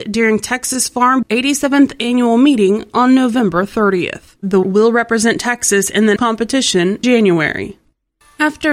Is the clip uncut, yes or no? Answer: no